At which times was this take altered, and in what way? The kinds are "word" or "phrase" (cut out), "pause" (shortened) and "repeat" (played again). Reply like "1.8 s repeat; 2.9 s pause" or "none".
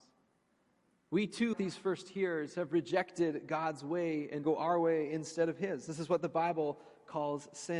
1.5 s word; 4.4 s phrase